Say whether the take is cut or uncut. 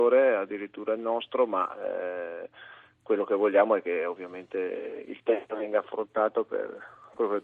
uncut